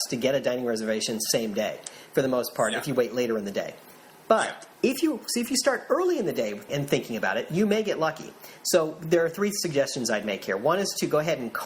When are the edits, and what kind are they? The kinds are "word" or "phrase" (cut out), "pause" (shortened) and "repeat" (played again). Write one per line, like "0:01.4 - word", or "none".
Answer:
0:04.7 - pause
0:06.7 - word